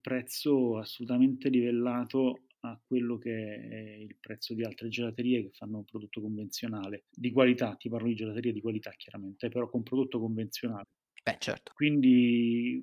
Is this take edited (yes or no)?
no